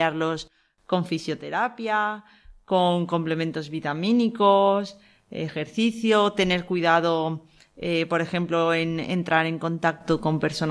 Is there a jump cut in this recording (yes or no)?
no